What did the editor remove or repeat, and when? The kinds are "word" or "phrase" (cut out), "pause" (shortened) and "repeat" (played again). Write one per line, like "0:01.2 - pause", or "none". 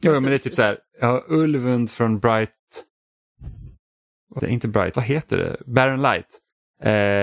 0:04.4 - word
0:04.9 - word